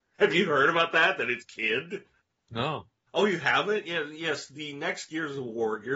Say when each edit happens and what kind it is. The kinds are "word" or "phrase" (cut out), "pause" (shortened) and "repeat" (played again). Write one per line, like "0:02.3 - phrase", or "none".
0:01.4 - word
0:03.1 - pause

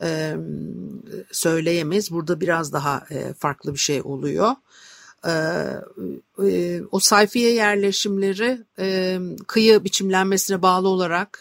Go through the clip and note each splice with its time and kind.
none

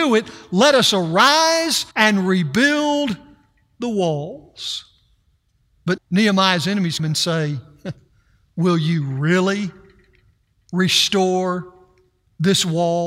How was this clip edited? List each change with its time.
0:01.9 - pause
0:06.0 - word
0:07.0 - word

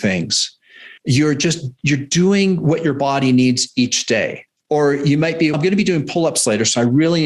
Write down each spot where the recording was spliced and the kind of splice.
0:01.0 - pause
0:04.5 - pause
0:05.5 - word

